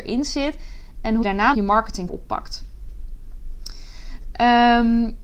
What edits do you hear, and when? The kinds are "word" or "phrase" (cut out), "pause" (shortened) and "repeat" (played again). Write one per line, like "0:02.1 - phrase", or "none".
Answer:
0:01.2 - word
0:01.5 - word
0:02.1 - word